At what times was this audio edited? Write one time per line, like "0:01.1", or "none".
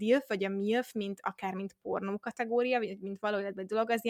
none